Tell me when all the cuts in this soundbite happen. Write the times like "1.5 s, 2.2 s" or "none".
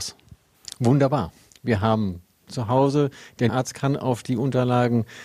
1.5 s, 2.5 s, 3.5 s